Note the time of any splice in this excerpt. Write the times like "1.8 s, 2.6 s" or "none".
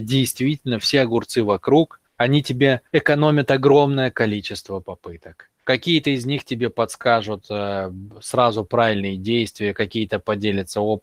2.1 s, 2.9 s, 5.6 s